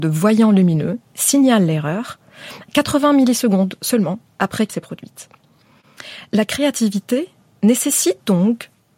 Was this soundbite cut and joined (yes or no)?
yes